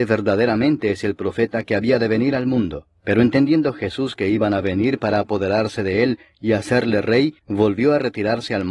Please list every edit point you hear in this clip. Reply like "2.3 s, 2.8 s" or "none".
3.0 s, 7.4 s